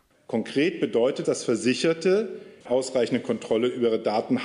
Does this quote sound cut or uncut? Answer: cut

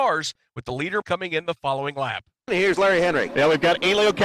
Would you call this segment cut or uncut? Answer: cut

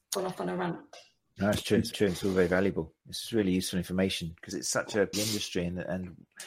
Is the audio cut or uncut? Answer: cut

